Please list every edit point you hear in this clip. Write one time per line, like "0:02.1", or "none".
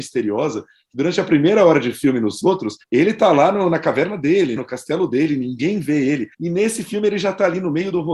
0:02.8
0:04.6
0:06.3